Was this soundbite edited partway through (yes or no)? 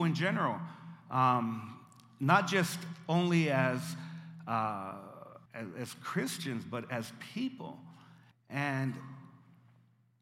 yes